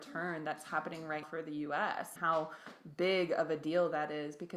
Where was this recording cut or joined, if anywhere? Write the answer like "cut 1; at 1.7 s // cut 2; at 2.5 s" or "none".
cut 1; at 1.2 s // cut 2; at 2.2 s